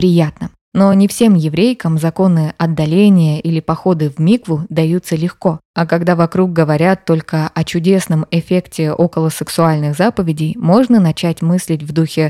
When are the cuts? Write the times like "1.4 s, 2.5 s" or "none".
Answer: none